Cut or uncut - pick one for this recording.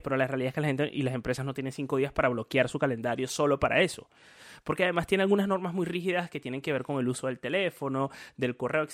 uncut